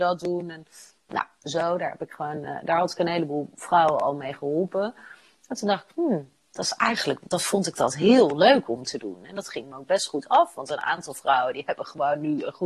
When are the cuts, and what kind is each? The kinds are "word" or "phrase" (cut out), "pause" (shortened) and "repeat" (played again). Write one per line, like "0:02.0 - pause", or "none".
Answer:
none

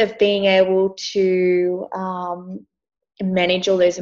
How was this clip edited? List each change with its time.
none

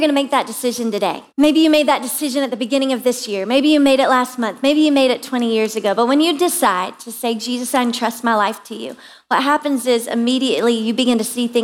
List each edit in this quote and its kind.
0:01.3 - pause

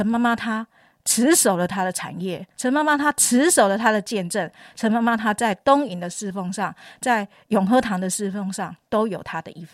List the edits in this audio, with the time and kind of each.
0:02.5 - pause

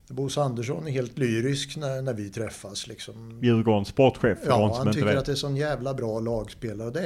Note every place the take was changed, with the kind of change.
none

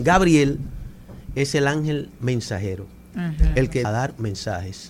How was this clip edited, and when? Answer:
0:03.8 - phrase

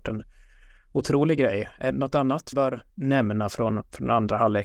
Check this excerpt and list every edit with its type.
0:01.9 - word
0:02.5 - word
0:02.9 - pause

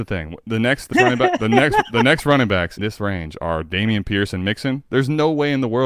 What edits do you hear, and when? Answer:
0:00.9 - word
0:02.8 - word

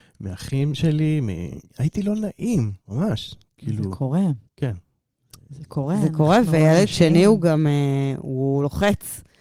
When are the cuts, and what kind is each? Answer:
0:01.7 - pause
0:02.8 - pause
0:04.5 - pause

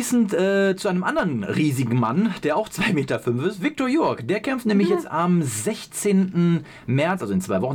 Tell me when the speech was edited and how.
none

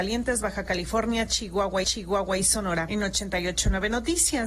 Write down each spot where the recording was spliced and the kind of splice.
0:01.8 - repeat

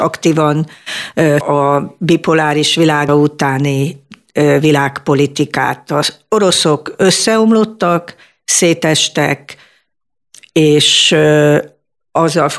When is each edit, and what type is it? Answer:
0:01.4 - word
0:03.1 - word

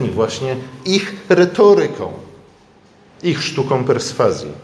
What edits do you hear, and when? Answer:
none

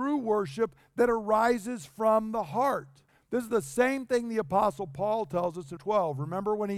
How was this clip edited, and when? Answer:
0:03.1 - pause
0:05.8 - word

